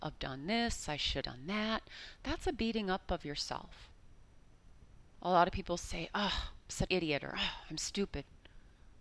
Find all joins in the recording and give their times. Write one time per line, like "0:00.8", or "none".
0:01.2
0:06.9